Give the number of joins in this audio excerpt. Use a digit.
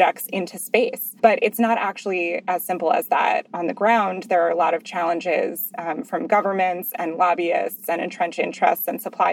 1